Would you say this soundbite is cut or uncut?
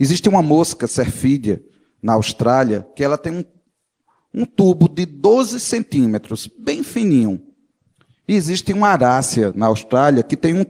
uncut